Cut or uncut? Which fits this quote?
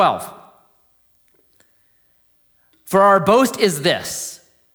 uncut